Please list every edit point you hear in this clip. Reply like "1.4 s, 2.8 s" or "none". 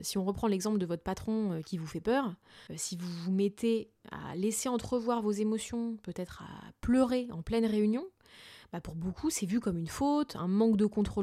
2.7 s

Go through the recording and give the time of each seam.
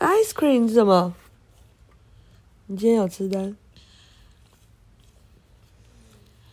none

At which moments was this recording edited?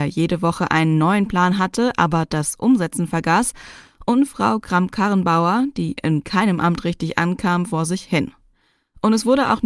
none

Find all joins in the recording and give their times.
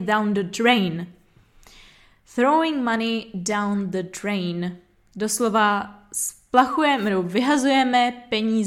none

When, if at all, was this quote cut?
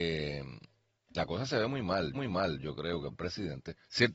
2.1 s, 3.1 s

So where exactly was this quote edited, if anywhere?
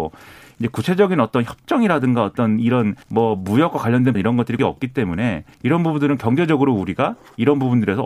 3.0 s, 4.1 s, 4.6 s, 5.5 s

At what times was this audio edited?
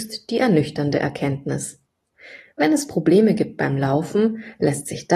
none

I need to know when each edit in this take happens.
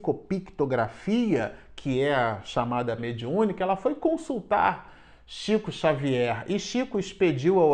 3.0 s

